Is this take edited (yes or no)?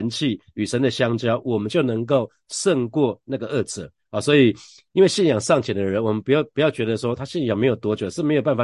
no